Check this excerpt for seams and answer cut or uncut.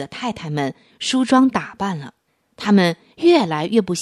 cut